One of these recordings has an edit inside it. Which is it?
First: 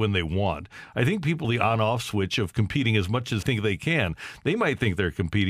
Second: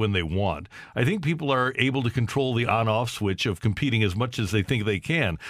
first; 2 cuts; at 1.4 s, 3.4 s

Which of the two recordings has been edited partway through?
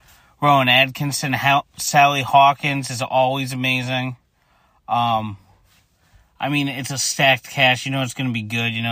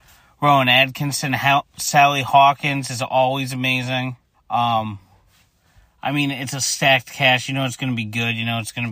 second; 1 cut; at 4.3 s

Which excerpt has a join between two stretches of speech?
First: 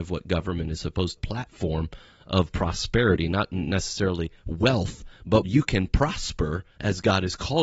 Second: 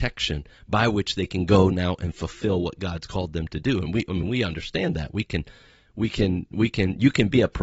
first; 2 cuts; at 1.2 s, 5.5 s

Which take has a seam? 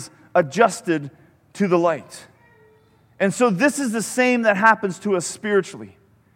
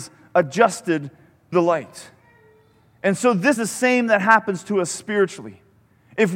second; 2 cuts; at 1.5 s, 3.6 s

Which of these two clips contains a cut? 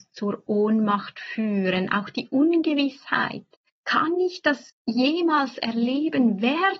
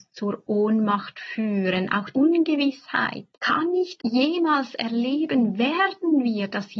second; 3 cuts; at 2.1 s, 3.3 s, 4.0 s

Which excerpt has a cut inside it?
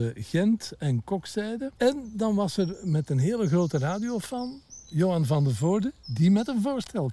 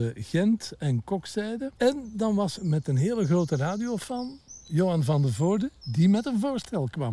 second; 1 cut; at 2.6 s

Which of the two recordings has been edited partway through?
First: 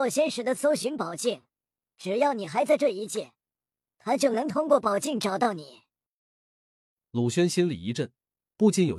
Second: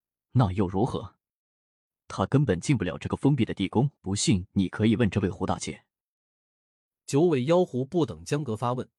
second; 1 cut; at 4.0 s

